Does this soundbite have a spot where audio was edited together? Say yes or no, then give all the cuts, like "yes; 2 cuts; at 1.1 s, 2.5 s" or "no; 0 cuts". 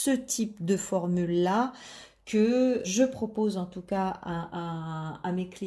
yes; 1 cut; at 2.8 s